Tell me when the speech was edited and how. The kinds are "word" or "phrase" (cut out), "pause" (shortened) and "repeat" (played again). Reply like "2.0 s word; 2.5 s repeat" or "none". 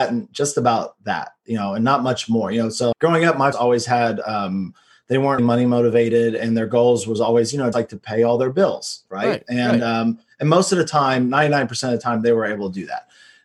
2.9 s word; 3.5 s word; 5.4 s word; 7.7 s word